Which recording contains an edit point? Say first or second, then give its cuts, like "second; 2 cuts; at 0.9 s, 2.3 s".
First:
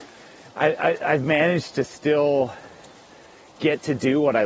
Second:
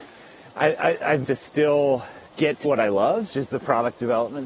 second; 4 cuts; at 1.2 s, 2.3 s, 2.6 s, 3.3 s